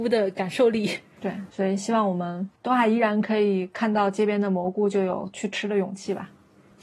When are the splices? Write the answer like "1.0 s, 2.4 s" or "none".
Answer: 1.1 s, 2.5 s